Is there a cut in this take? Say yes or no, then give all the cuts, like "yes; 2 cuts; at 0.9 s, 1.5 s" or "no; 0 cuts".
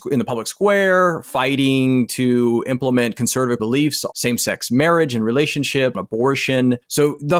yes; 3 cuts; at 3.6 s, 4.1 s, 5.9 s